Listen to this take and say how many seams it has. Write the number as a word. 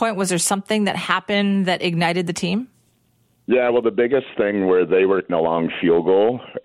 one